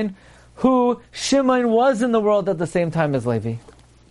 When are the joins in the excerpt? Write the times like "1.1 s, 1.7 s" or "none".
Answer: none